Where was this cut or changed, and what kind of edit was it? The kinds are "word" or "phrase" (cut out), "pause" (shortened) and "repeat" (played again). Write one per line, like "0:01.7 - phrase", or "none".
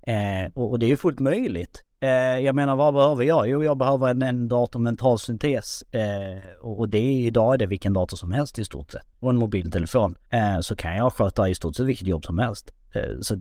0:09.1 - pause
0:10.3 - pause